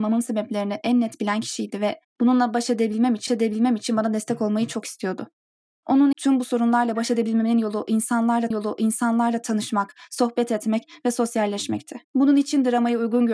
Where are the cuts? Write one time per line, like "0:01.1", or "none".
0:02.1
0:03.3
0:06.1
0:08.5
0:12.0